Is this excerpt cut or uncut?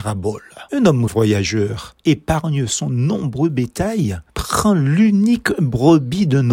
cut